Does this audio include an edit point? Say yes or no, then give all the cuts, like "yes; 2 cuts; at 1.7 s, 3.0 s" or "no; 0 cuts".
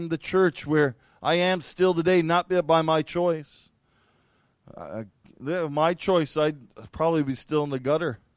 no; 0 cuts